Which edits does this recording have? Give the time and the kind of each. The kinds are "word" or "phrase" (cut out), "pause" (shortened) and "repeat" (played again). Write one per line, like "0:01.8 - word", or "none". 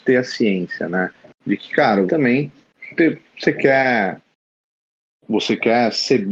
0:02.1 - word